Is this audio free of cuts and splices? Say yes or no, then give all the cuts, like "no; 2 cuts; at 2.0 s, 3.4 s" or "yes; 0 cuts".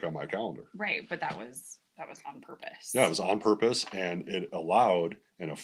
no; 1 cut; at 1.9 s